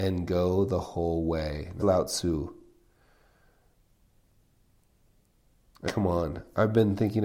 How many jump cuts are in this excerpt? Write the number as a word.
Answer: two